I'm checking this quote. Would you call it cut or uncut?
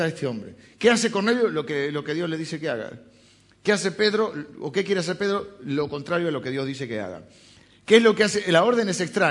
uncut